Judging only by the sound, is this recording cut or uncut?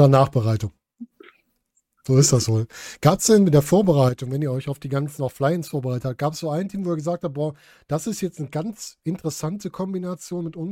uncut